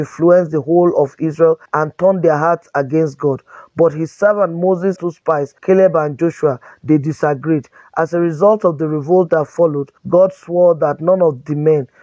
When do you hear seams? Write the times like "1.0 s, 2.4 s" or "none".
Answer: 1.7 s, 5.0 s, 5.6 s, 10.0 s

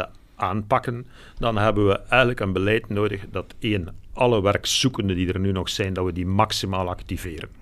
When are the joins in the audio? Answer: none

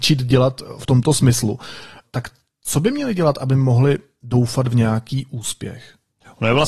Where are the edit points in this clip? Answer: none

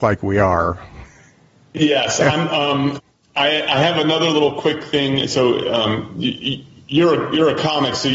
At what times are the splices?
none

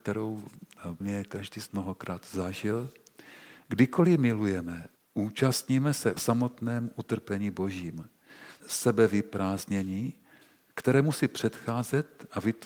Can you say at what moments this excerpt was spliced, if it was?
1.0 s, 1.7 s, 5.0 s, 6.2 s, 8.6 s

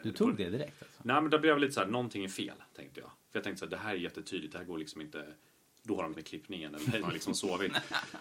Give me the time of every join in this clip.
6.1 s, 7.0 s

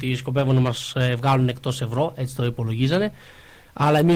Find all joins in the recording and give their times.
none

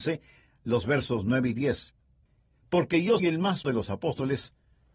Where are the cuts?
2.3 s, 3.2 s, 3.6 s

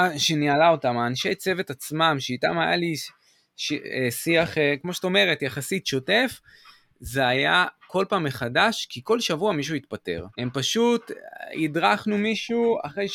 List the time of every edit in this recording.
10.3 s

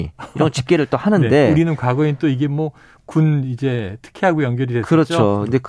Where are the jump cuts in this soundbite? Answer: none

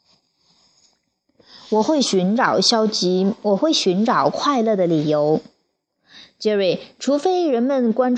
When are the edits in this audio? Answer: none

